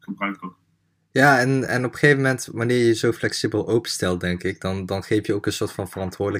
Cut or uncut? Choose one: uncut